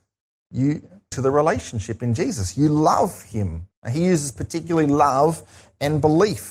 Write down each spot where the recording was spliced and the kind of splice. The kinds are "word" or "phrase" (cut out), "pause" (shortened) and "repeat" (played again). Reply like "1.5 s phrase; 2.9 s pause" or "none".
1.1 s word; 3.7 s pause